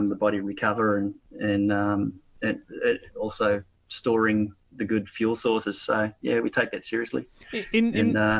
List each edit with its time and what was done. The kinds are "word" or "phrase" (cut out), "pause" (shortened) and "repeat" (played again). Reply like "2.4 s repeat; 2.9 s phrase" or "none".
4.6 s pause